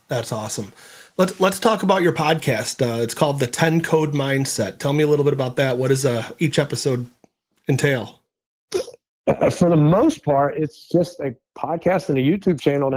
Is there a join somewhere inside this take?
no; 0 cuts

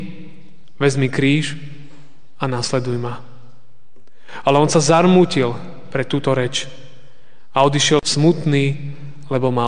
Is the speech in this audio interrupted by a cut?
no; 0 cuts

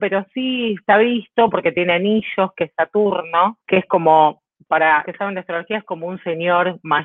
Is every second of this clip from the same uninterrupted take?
no; 2 cuts; at 3.6 s, 5.1 s

